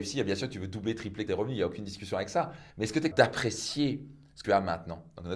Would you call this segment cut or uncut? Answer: cut